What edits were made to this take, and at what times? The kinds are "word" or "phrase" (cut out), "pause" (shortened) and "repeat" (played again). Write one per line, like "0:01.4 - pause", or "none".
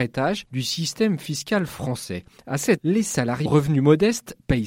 0:02.8 - word
0:03.5 - word